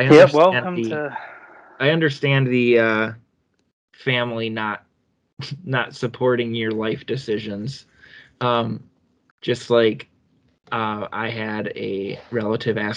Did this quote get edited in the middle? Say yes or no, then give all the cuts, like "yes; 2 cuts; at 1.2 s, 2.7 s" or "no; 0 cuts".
no; 0 cuts